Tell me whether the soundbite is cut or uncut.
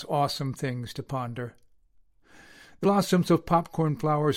cut